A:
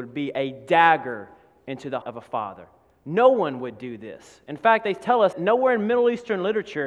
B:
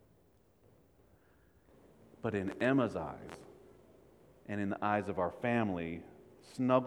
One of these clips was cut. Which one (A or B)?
A